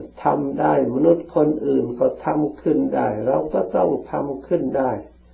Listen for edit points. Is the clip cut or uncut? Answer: uncut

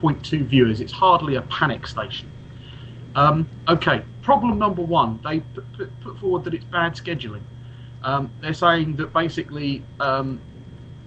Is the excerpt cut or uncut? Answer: uncut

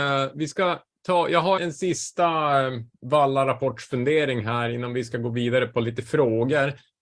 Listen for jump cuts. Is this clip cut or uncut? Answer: cut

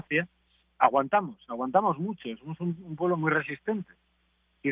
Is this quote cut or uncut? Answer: uncut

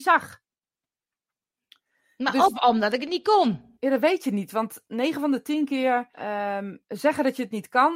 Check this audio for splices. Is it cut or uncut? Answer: cut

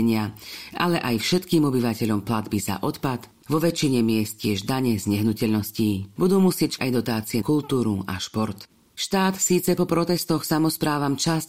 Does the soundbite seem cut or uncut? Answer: cut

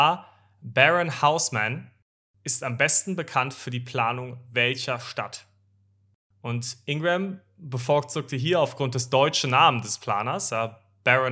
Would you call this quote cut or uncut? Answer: uncut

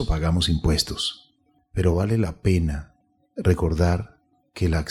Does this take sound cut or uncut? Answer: uncut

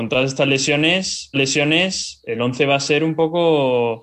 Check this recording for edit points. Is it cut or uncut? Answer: cut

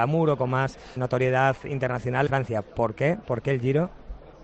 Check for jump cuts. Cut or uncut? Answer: cut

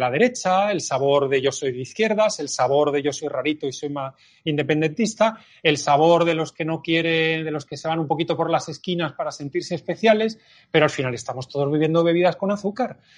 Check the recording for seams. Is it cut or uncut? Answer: uncut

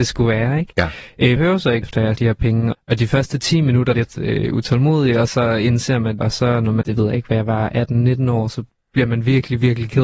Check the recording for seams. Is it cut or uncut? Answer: cut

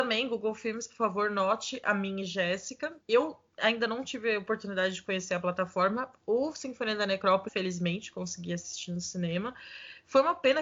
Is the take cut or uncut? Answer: cut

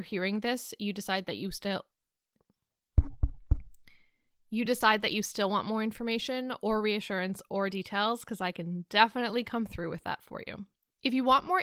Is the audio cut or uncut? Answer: uncut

